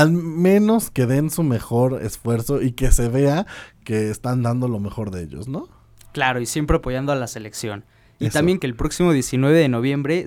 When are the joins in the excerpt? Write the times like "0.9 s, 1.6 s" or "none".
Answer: 8.6 s

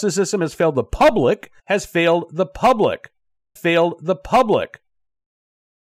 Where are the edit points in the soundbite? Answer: 1.6 s, 3.6 s

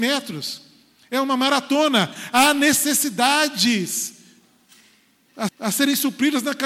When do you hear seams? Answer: 5.5 s

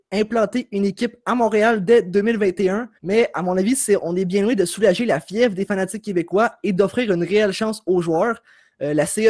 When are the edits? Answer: 3.0 s

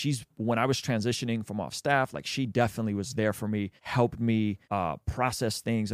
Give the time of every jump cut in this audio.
3.8 s, 4.6 s

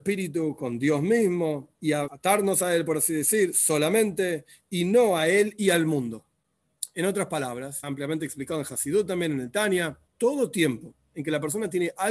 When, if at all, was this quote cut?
1.7 s, 2.1 s, 7.8 s, 10.1 s

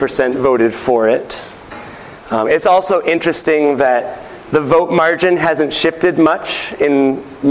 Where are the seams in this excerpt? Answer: none

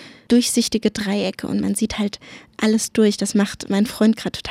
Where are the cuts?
none

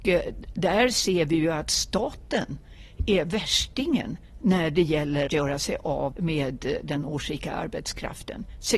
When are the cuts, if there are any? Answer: 5.3 s, 6.1 s

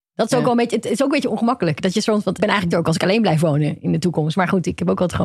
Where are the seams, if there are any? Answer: 2.4 s, 2.7 s

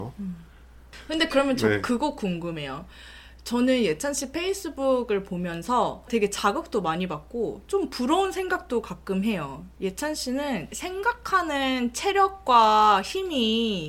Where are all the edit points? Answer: 6.1 s

